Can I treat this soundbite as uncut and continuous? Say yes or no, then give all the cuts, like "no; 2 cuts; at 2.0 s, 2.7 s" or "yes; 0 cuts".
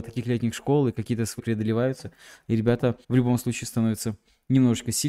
no; 2 cuts; at 1.4 s, 3.0 s